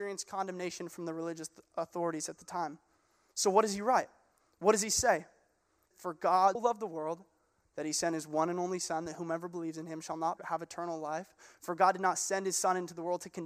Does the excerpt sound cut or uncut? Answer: cut